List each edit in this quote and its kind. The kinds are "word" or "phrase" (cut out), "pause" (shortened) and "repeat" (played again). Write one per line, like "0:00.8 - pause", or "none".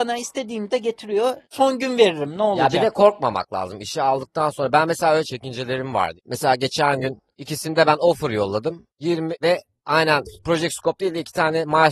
none